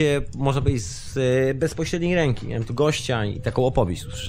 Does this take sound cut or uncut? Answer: uncut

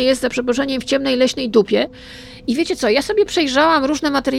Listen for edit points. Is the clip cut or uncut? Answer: uncut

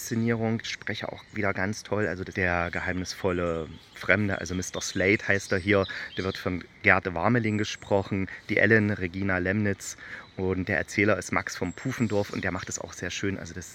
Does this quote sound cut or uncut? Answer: uncut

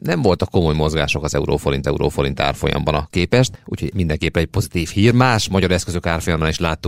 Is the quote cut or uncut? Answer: cut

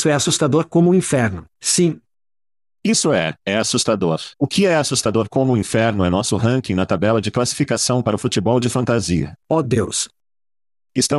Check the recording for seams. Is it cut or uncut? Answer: cut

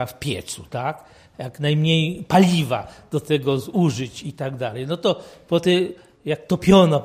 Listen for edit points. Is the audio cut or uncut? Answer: uncut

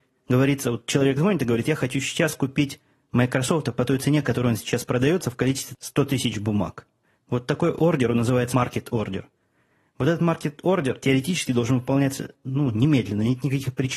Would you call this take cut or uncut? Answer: uncut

